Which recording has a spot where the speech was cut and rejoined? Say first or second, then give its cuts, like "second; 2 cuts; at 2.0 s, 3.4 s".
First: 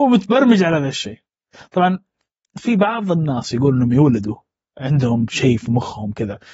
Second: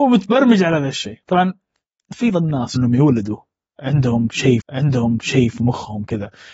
second; 4 cuts; at 1.2 s, 2.3 s, 2.8 s, 4.6 s